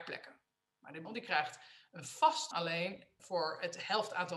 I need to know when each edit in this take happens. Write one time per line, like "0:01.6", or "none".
0:01.0
0:02.5
0:03.2